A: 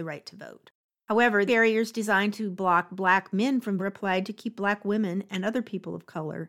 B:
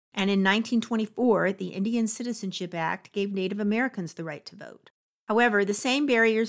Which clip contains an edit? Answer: A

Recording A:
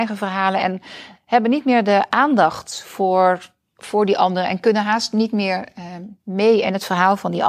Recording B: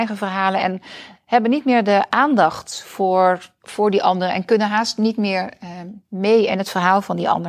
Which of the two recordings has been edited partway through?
B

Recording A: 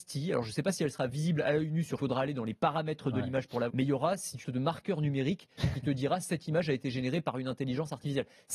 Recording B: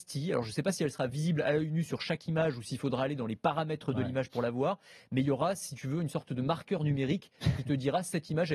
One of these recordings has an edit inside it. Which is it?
A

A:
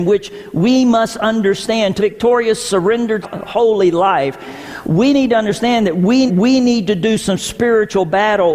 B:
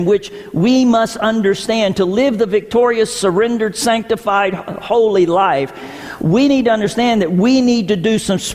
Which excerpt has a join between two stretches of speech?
A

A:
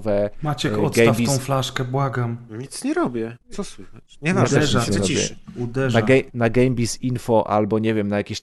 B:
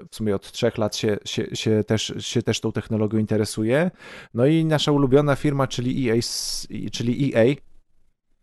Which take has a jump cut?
A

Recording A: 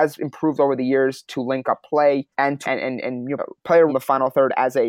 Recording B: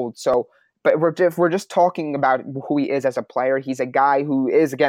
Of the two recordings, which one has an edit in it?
A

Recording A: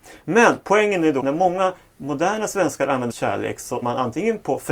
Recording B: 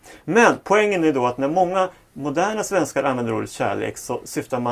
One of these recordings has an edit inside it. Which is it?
A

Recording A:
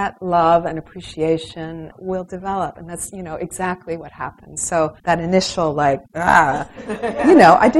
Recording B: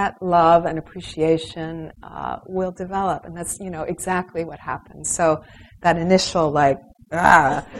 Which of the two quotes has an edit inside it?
A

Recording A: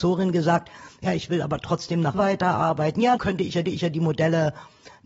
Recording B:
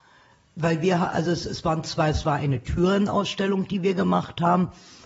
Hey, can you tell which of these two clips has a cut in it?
A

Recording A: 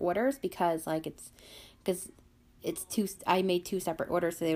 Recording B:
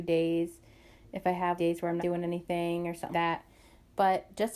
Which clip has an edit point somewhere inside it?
B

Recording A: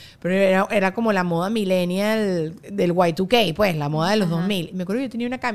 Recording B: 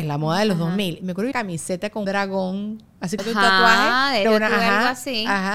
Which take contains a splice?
B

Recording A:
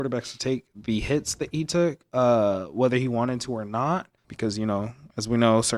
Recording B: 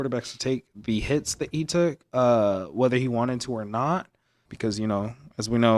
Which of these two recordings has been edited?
A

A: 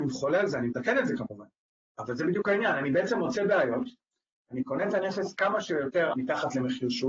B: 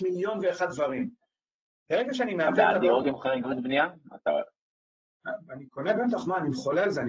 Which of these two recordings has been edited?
A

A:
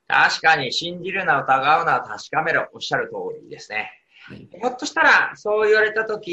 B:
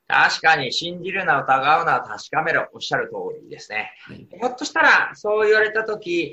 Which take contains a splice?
B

